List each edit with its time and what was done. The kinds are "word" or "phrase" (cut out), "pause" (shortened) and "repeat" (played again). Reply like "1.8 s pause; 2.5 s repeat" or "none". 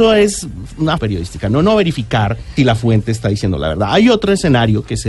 1.0 s word; 2.6 s word